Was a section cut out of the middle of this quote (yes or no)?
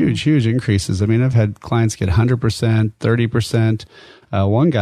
no